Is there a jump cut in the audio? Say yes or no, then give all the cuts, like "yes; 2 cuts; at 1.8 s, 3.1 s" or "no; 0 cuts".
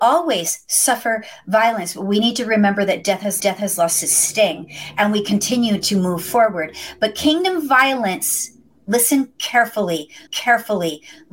yes; 2 cuts; at 3.4 s, 10.3 s